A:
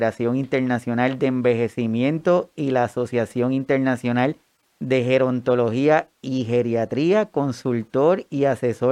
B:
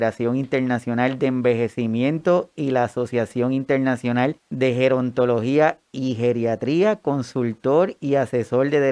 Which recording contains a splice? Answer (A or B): B